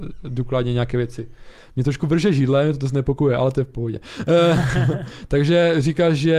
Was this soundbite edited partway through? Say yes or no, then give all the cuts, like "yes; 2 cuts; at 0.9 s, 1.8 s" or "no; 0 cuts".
no; 0 cuts